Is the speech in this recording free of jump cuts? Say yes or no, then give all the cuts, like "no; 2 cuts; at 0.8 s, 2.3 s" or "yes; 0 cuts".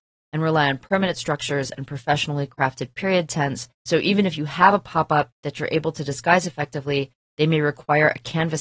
no; 1 cut; at 3.7 s